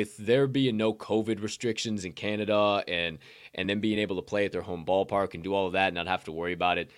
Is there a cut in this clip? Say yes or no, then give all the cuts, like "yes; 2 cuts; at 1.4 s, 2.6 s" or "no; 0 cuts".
no; 0 cuts